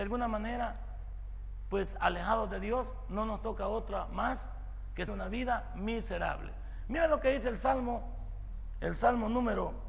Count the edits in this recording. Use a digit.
1